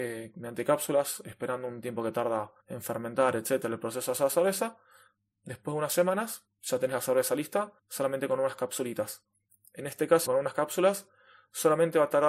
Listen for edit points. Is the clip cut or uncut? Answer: cut